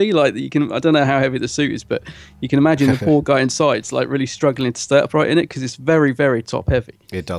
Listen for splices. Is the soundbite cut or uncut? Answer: uncut